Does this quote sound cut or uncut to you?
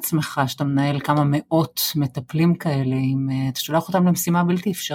uncut